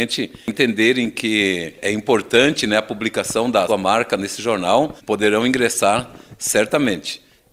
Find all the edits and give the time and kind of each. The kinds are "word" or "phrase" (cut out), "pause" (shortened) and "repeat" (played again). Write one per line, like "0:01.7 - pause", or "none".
0:03.7 - word
0:05.0 - pause